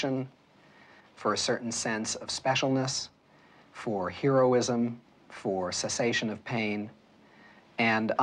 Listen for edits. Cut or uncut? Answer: uncut